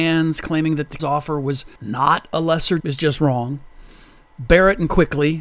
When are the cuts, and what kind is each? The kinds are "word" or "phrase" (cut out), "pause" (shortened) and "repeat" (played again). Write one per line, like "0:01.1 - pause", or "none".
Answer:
0:01.0 - word
0:01.8 - pause
0:02.8 - phrase